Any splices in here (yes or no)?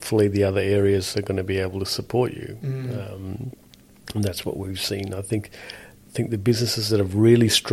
no